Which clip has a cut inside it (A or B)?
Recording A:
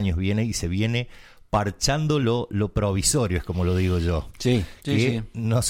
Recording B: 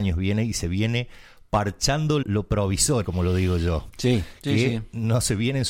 B